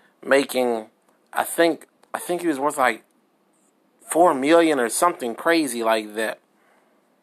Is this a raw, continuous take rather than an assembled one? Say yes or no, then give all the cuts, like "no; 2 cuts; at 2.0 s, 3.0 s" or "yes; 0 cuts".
no; 1 cut; at 2.0 s